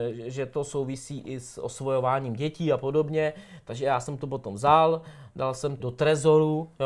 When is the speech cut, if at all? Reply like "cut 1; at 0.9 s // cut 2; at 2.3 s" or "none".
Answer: cut 1; at 5.8 s